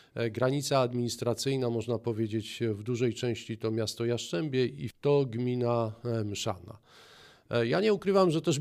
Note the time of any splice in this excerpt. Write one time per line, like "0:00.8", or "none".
0:04.9